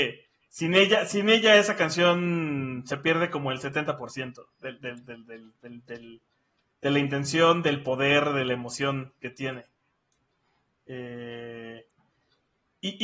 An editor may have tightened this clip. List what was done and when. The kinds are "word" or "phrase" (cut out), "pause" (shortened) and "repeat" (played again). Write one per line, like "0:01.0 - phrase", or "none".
none